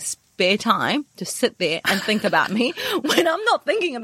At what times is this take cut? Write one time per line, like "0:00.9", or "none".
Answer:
none